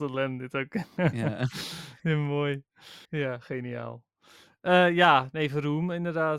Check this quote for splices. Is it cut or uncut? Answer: cut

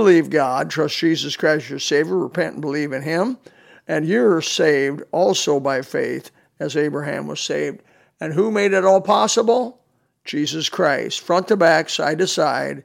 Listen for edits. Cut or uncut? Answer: uncut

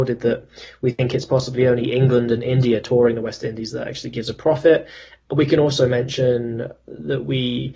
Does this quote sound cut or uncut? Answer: uncut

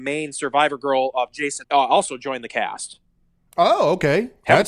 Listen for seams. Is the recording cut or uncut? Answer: cut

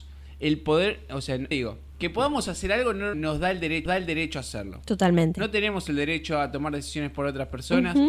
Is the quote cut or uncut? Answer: cut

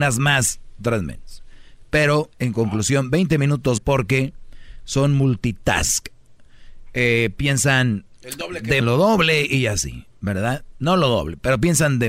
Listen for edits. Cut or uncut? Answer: cut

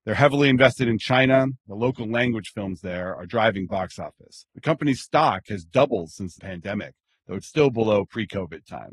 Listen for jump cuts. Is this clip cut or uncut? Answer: cut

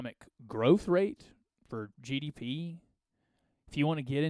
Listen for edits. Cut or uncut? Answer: uncut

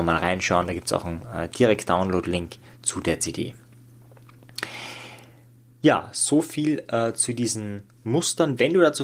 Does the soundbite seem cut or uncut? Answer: uncut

